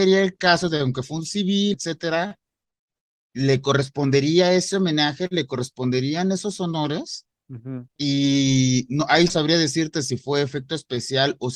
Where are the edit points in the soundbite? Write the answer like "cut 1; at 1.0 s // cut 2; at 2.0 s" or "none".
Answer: cut 1; at 1.7 s // cut 2; at 9.3 s